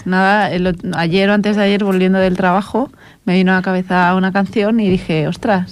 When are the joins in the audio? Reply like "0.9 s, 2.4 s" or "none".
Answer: none